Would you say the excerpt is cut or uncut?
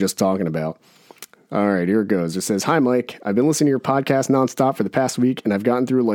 uncut